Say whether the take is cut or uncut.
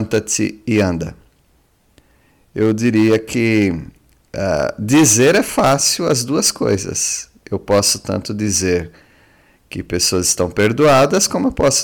uncut